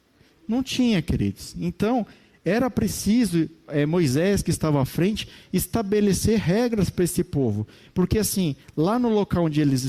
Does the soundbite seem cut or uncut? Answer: uncut